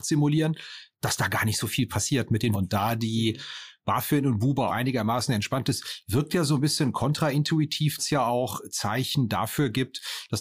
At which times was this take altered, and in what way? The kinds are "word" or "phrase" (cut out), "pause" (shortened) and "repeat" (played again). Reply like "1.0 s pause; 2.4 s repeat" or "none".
2.5 s word; 4.7 s word; 8.0 s word